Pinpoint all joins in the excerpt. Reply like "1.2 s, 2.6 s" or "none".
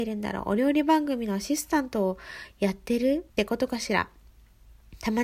3.3 s